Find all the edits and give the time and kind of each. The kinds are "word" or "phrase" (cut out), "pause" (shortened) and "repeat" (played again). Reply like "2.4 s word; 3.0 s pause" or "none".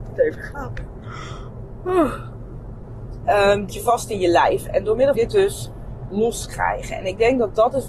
3.7 s word; 5.1 s phrase